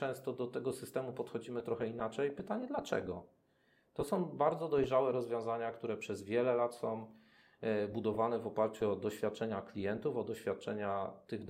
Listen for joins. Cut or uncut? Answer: uncut